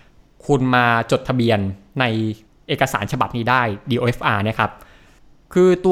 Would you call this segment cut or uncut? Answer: cut